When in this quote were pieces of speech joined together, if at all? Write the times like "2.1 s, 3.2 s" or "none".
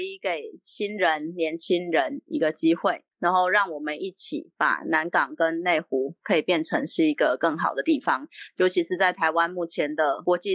3.1 s